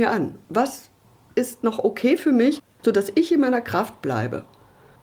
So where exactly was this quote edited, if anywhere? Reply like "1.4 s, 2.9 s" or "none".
none